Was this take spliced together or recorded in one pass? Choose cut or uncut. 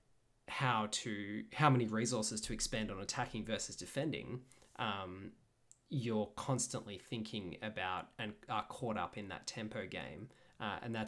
uncut